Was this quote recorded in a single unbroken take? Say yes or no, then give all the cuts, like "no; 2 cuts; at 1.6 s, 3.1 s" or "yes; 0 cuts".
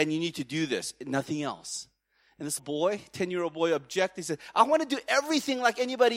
no; 1 cut; at 2.6 s